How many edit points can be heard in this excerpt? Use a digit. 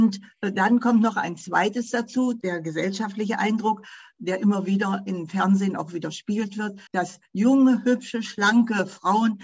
1